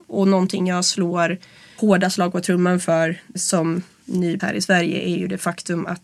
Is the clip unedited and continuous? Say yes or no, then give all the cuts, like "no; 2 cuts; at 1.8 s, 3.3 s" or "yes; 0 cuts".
no; 1 cut; at 4.4 s